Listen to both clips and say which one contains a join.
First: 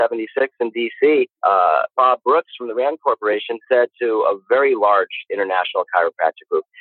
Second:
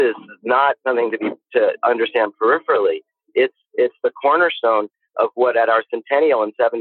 first; 1 cut; at 1.4 s

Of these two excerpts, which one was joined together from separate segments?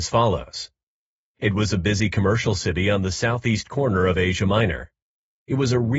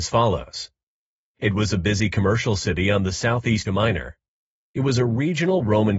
second; 1 cut; at 3.6 s

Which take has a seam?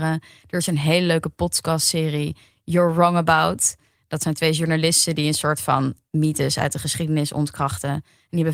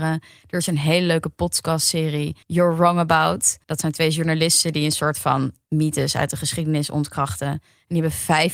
second; 2 cuts; at 2.4 s, 3.6 s

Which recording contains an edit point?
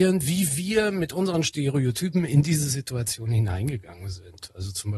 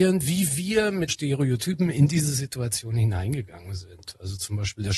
second; 1 cut; at 1.1 s

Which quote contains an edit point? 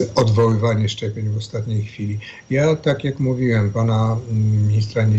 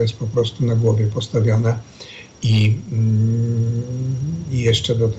first; 1 cut; at 3.7 s

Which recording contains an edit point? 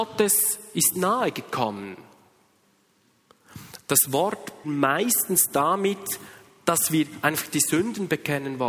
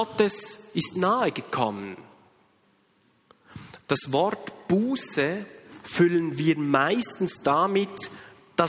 first; 1 cut; at 4.6 s

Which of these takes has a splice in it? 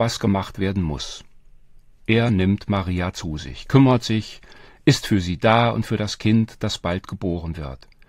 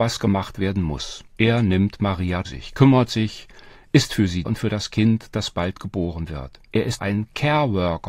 second; 5 cuts; at 1.3 s, 2.4 s, 4.4 s, 6.7 s, 7.0 s

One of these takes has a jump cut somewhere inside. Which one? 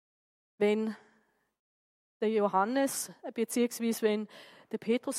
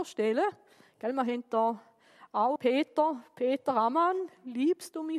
second; 1 cut; at 2.6 s

